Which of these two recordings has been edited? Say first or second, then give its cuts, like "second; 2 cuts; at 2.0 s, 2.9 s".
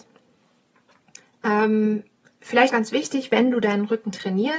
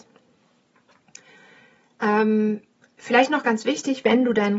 first; 2 cuts; at 1.2 s, 2.7 s